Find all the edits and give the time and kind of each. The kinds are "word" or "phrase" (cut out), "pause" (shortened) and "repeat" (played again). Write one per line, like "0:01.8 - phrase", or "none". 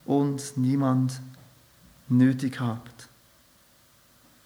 none